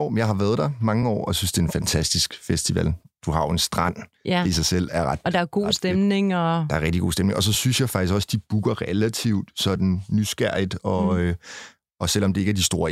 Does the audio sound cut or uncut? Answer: uncut